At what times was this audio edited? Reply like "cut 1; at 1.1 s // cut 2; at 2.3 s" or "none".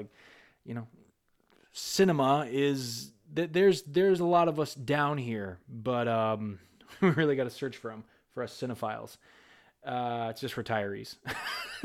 none